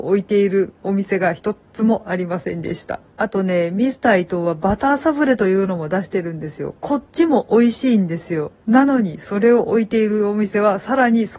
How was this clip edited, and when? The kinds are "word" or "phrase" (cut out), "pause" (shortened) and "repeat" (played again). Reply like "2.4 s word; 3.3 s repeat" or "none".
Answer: 3.1 s pause